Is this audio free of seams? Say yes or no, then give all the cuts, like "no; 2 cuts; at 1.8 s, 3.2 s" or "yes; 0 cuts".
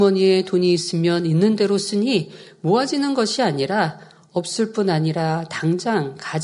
yes; 0 cuts